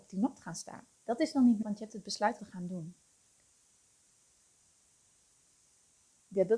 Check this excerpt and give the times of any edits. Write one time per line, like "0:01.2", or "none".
0:00.9
0:01.6
0:02.4